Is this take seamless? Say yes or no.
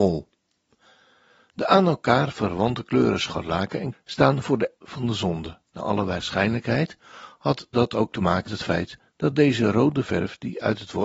no